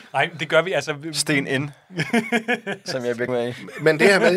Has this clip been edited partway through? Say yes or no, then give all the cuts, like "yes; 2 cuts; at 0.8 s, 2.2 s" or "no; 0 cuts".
yes; 1 cut; at 3.3 s